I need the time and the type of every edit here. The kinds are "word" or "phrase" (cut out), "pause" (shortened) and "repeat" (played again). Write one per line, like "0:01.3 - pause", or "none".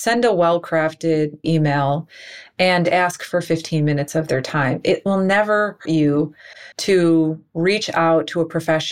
0:01.4 - word
0:05.9 - word
0:06.7 - pause

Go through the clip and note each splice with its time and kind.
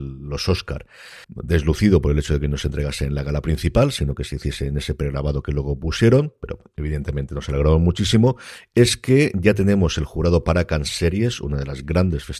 0:01.2 - pause

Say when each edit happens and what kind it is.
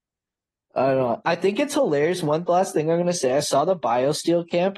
none

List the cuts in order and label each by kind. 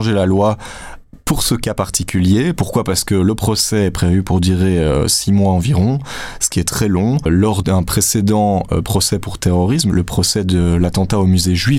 0:09.9 - word

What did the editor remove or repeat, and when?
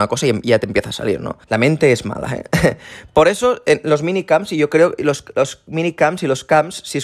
0:01.4 - pause

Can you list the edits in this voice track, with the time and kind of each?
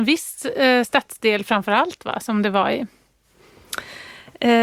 none

